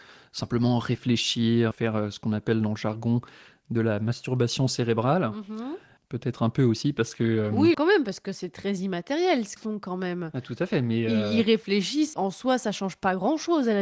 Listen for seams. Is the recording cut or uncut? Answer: cut